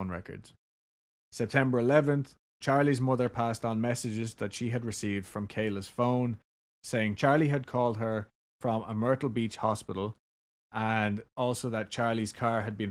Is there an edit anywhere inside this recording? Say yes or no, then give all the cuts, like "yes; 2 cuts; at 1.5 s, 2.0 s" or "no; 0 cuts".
no; 0 cuts